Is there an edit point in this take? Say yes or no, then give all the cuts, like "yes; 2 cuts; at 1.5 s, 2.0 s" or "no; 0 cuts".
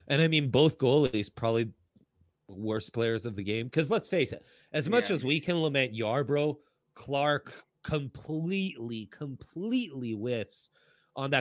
no; 0 cuts